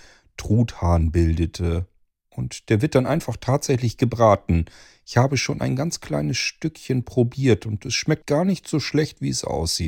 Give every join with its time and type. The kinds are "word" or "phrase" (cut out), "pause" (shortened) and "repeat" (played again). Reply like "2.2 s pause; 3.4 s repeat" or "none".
8.2 s word